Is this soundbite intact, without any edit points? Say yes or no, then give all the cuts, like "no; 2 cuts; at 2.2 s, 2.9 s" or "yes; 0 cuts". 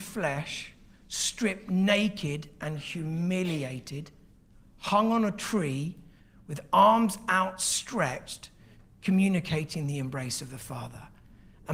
yes; 0 cuts